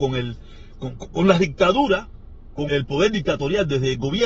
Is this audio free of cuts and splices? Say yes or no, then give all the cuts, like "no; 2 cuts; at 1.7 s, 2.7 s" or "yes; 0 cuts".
no; 1 cut; at 2.7 s